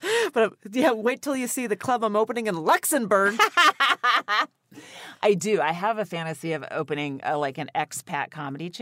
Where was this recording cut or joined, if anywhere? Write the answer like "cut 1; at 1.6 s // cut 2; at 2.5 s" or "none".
none

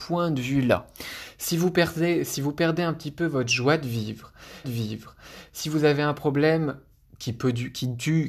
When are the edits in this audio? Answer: cut 1; at 4.6 s

